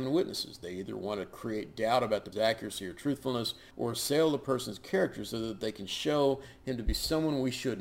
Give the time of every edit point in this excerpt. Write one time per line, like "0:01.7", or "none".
0:02.3
0:03.7